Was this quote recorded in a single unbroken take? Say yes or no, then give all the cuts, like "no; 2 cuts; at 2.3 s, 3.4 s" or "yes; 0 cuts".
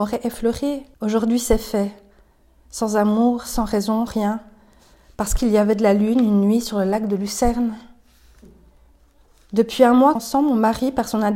no; 3 cuts; at 0.9 s, 4.1 s, 10.2 s